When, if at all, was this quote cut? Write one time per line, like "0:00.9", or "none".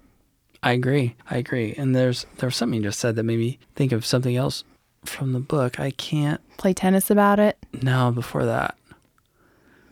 0:01.2
0:03.6
0:04.8